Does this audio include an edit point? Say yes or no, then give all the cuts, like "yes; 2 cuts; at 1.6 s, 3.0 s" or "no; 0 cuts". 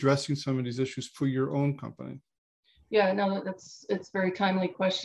no; 0 cuts